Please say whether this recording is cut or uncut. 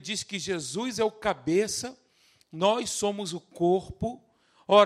uncut